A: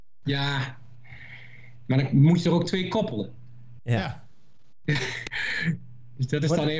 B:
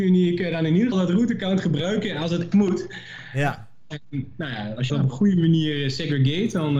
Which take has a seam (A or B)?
B